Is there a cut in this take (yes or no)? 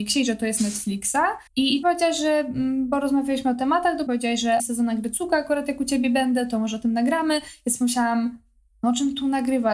yes